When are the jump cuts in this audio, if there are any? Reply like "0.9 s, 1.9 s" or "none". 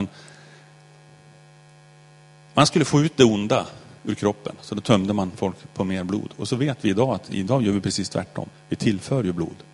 4.0 s, 8.5 s

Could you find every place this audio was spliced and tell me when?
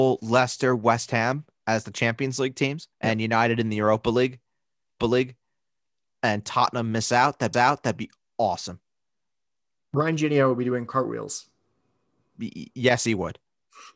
2.9 s, 5.0 s, 7.5 s

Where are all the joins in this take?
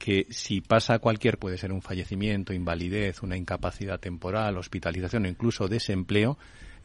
1.4 s

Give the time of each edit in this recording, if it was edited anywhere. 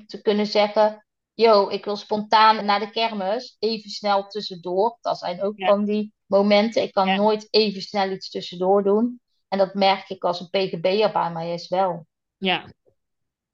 1.2 s, 2.6 s, 6.2 s

